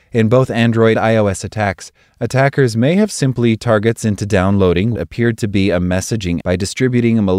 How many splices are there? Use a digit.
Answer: 4